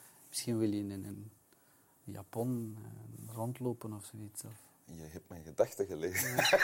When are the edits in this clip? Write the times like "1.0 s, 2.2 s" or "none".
none